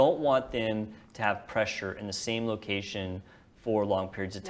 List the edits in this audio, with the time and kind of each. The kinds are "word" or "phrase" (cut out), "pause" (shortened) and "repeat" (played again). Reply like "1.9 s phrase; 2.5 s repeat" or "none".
none